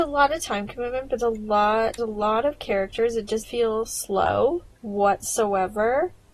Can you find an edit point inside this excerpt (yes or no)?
yes